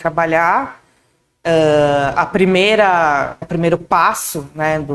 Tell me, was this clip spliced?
yes; 1 cut; at 3.4 s

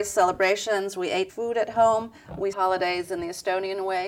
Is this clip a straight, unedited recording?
no; 2 cuts; at 1.3 s, 2.5 s

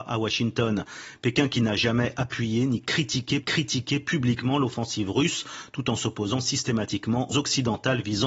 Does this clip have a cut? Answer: yes; 2 cuts; at 3.4 s, 7.3 s

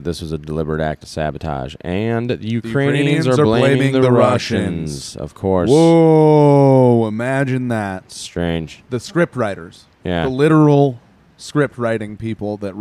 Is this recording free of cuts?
yes; 0 cuts

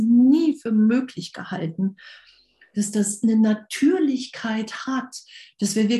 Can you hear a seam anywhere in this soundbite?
no; 0 cuts

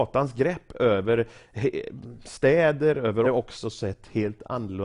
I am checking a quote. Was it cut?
yes; 1 cut; at 3.2 s

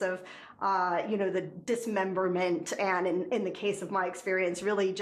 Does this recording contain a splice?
no; 0 cuts

